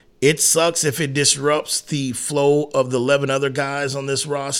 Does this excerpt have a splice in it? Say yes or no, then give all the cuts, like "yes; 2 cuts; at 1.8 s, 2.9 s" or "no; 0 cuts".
no; 0 cuts